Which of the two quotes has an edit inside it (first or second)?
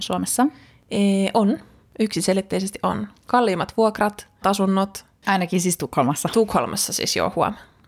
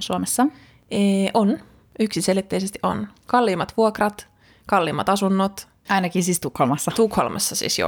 first